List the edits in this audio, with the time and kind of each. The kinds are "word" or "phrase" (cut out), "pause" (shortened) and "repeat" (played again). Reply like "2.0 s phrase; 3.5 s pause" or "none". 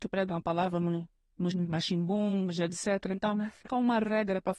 1.5 s word; 3.7 s word